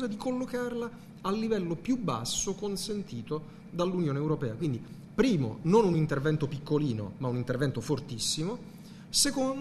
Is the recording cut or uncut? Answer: uncut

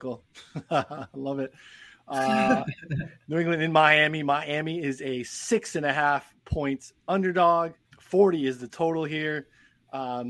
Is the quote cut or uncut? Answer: cut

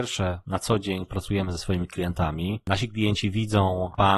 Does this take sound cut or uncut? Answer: uncut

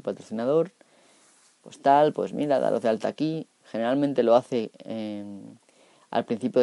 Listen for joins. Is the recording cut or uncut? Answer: uncut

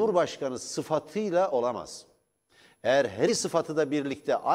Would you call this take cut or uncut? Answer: cut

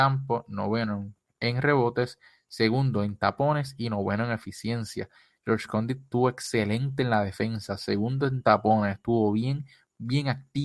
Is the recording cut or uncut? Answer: uncut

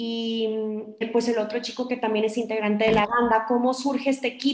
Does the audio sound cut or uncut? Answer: cut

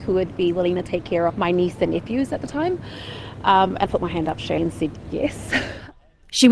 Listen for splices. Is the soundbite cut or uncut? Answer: cut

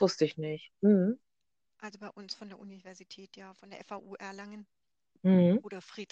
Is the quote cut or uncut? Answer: uncut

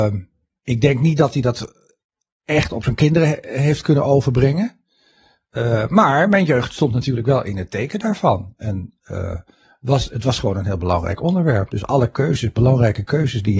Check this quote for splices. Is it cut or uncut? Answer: uncut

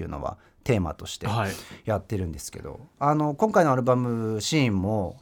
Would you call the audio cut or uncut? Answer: uncut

